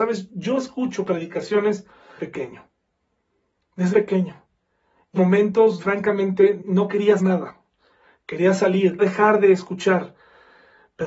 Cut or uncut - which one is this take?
cut